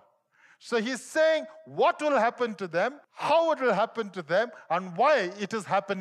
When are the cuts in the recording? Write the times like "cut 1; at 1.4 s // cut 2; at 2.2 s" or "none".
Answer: cut 1; at 3.0 s